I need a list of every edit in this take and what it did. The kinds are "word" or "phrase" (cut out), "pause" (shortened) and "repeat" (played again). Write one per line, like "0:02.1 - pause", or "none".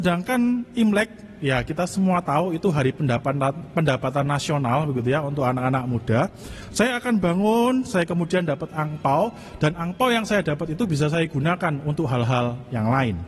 none